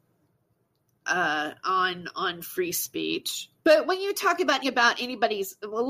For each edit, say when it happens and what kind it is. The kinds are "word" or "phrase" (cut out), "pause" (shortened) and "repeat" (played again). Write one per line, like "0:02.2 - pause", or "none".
0:03.6 - pause
0:04.6 - word